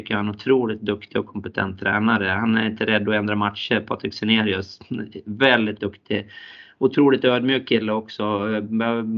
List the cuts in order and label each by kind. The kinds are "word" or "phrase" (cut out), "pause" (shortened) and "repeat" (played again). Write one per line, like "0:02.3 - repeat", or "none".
0:05.8 - word